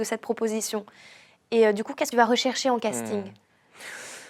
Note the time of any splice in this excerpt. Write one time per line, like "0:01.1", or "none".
0:02.1